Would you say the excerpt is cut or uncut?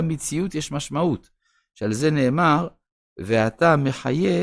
uncut